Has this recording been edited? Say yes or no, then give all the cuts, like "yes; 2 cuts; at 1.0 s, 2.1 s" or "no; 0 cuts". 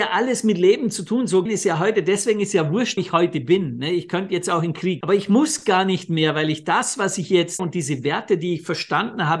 yes; 4 cuts; at 1.5 s, 3.0 s, 5.0 s, 7.6 s